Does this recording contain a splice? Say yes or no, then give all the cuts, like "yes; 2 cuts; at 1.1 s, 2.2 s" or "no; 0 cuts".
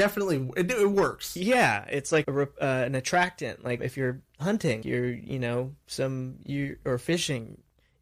yes; 3 cuts; at 2.2 s, 3.8 s, 4.8 s